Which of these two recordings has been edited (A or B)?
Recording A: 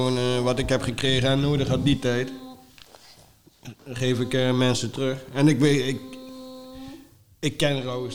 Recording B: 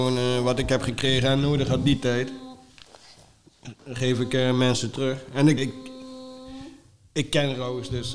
B